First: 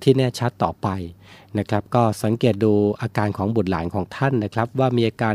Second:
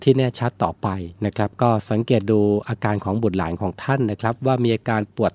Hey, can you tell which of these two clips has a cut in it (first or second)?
second